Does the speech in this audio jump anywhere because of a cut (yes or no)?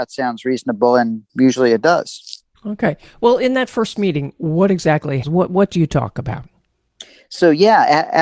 yes